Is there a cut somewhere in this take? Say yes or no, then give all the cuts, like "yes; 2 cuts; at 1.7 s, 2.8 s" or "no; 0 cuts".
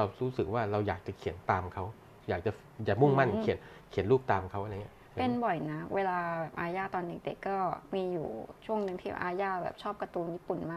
no; 0 cuts